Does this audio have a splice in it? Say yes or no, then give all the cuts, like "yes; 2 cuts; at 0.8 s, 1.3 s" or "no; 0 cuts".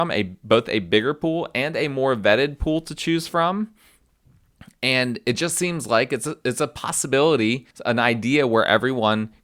yes; 1 cut; at 7.7 s